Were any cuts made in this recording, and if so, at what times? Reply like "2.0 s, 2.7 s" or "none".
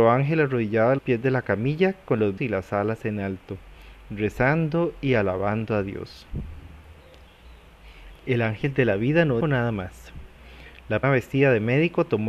1.0 s, 2.4 s, 9.4 s, 11.0 s